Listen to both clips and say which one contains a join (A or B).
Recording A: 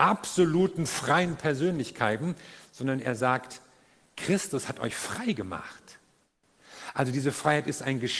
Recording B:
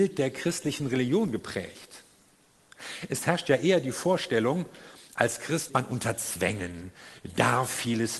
B